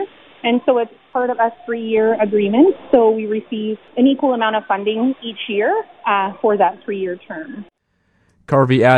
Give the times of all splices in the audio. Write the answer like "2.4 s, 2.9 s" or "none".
none

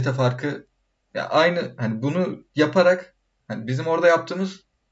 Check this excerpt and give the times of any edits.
none

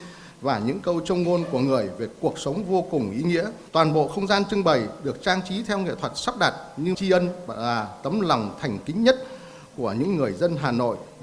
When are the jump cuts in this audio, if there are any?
3.7 s, 6.9 s

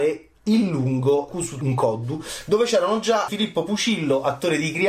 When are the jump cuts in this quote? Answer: 1.3 s, 1.6 s, 3.3 s

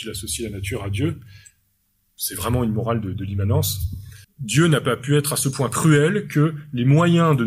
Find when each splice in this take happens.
4.2 s

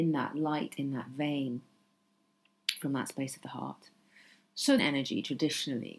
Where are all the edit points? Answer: 4.8 s

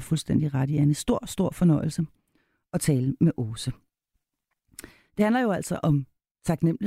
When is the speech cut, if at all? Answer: none

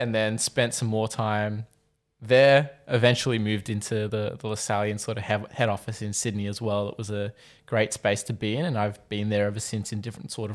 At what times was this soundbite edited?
none

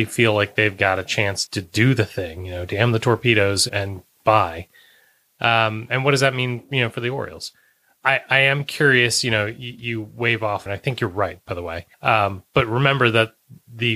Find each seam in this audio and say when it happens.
1.5 s, 3.7 s, 10.7 s, 11.9 s

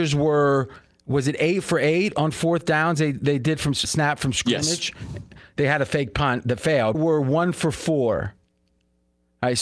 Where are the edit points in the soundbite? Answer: 3.8 s, 6.9 s

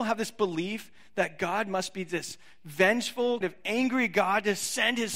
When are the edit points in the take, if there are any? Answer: 3.4 s

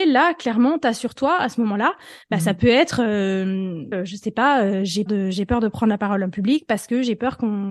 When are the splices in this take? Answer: 3.9 s, 5.1 s

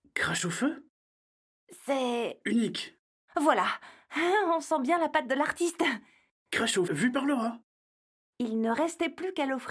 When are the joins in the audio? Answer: 6.9 s

